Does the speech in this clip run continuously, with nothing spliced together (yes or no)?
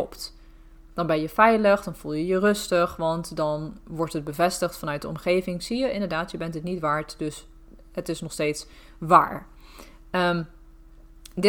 yes